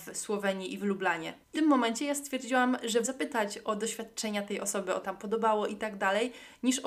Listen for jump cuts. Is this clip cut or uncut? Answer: cut